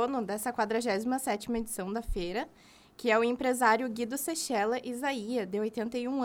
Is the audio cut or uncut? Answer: uncut